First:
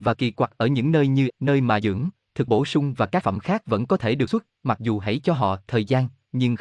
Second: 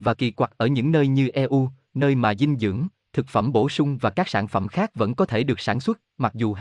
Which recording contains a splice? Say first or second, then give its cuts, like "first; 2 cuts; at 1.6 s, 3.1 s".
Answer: first; 5 cuts; at 1.3 s, 1.8 s, 2.5 s, 3.2 s, 4.3 s